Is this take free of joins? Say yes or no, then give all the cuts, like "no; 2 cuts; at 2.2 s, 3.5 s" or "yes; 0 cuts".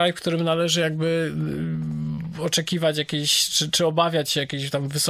yes; 0 cuts